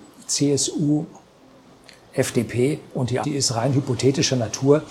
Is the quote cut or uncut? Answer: cut